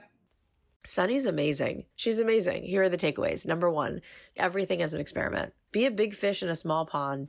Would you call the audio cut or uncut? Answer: cut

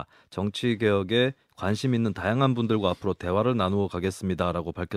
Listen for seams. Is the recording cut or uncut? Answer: uncut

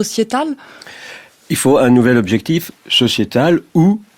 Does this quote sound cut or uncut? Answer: uncut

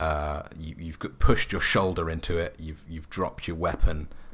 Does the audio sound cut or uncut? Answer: uncut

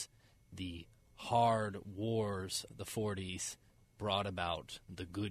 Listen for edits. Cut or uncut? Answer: cut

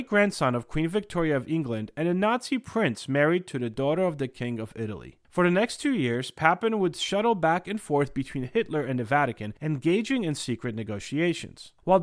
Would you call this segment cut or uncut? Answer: uncut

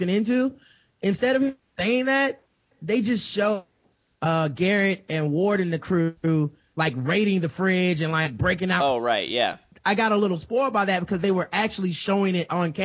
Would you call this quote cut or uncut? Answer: uncut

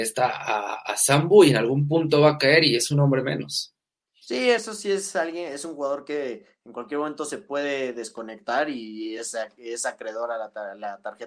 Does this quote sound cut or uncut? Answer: uncut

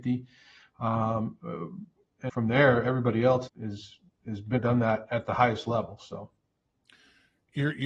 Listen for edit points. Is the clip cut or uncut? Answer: cut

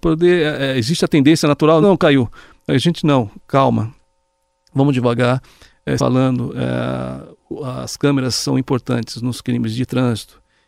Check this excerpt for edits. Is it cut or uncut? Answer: cut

